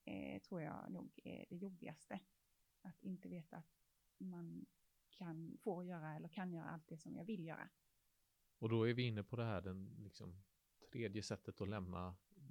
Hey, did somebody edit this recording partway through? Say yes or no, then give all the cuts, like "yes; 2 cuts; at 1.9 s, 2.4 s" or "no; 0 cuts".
no; 0 cuts